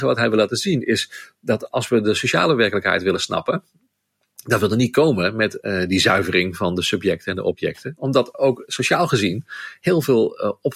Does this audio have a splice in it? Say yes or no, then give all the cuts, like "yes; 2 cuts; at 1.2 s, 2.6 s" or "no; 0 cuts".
no; 0 cuts